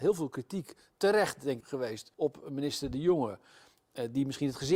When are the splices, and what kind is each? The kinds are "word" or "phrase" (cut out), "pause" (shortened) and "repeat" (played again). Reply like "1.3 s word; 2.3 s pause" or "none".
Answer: 1.6 s word; 2.1 s pause